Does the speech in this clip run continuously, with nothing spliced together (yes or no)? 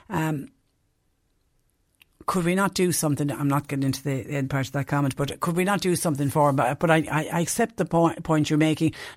yes